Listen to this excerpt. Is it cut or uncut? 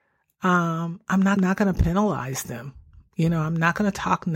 cut